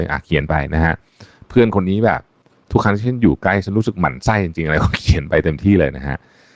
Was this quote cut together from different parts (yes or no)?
no